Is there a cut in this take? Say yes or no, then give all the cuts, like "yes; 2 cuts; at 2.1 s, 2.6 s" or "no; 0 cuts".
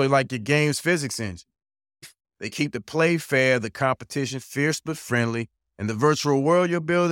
no; 0 cuts